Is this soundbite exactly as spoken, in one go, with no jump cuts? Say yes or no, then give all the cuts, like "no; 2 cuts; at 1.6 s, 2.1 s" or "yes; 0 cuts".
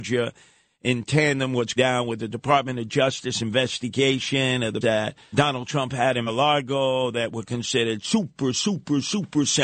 no; 4 cuts; at 1.8 s, 4.8 s, 5.3 s, 6.3 s